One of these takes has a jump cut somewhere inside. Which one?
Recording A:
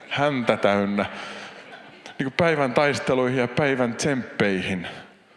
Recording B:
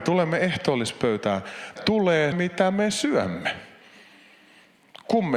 B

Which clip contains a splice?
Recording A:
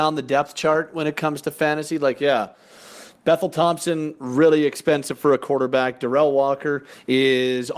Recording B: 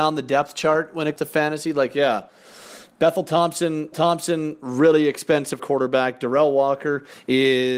B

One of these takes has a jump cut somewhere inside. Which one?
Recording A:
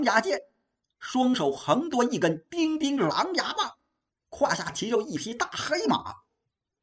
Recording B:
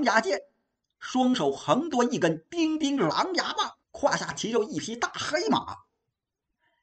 B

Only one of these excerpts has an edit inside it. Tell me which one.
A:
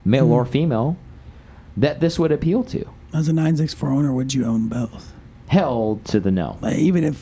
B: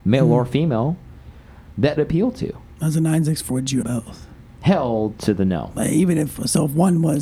B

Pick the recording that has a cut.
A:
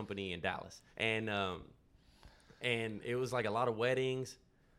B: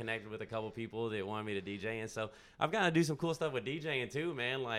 A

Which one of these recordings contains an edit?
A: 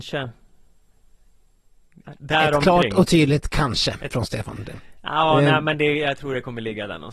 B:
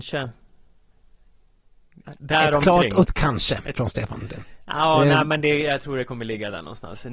B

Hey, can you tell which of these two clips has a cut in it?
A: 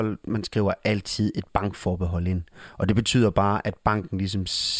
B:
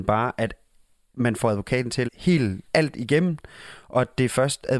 B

